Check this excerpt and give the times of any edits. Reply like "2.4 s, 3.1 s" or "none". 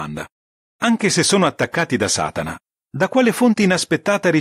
none